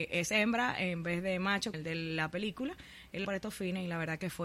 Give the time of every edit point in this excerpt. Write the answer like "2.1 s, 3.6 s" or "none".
1.7 s, 3.2 s